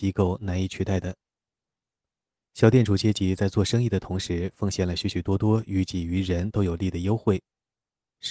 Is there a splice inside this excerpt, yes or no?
no